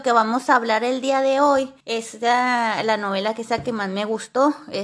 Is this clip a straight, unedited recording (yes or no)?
no